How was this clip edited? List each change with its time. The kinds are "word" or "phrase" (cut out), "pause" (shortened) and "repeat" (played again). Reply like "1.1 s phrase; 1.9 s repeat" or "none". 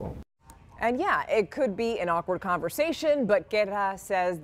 none